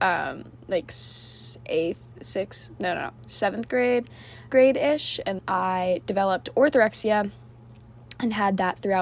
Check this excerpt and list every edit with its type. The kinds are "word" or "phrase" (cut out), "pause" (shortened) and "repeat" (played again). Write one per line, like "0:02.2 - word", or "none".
0:04.5 - phrase
0:05.4 - word